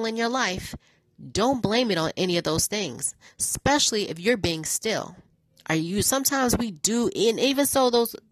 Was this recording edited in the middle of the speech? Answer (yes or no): yes